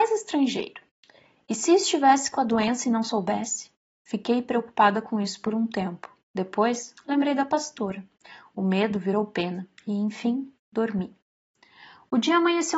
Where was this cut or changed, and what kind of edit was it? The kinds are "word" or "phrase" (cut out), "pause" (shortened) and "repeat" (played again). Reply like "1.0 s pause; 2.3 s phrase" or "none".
none